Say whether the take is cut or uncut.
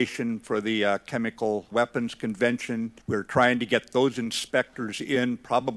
cut